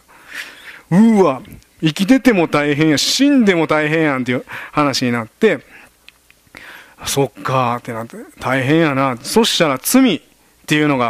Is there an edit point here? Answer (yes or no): no